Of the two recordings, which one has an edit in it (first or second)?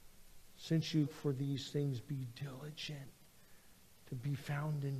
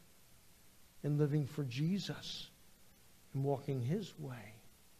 first